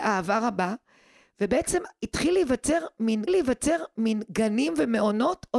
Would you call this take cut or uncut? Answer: cut